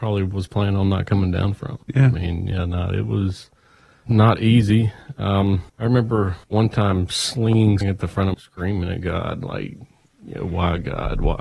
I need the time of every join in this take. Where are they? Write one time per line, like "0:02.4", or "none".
0:01.8
0:04.1
0:05.7
0:06.4
0:07.8
0:08.3